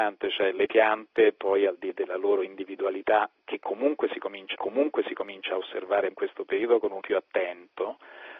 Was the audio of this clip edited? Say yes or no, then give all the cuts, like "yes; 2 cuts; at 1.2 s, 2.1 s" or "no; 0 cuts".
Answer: yes; 4 cuts; at 1.9 s, 4.5 s, 6.1 s, 7.0 s